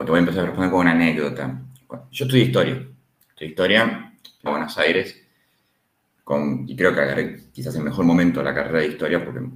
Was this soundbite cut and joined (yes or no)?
yes